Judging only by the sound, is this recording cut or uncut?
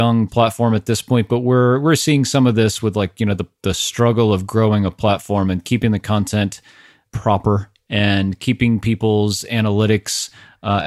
uncut